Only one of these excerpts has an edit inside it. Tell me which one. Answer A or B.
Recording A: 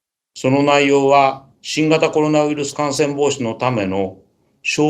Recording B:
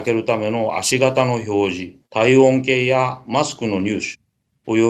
B